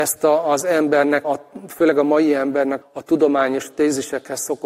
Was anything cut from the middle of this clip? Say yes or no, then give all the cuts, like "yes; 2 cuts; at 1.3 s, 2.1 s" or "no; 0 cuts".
yes; 2 cuts; at 1.2 s, 2.8 s